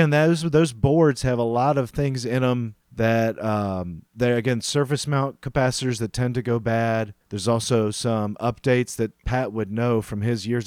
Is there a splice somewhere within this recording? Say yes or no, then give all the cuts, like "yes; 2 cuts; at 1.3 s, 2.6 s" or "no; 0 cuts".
yes; 3 cuts; at 2.8 s, 4.1 s, 7.2 s